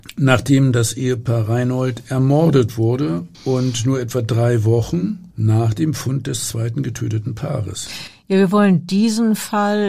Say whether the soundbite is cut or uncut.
cut